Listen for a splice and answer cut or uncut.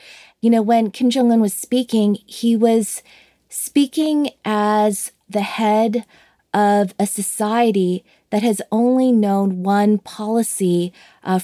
uncut